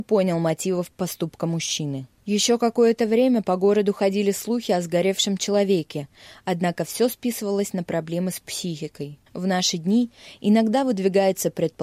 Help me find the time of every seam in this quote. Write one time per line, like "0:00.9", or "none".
0:09.3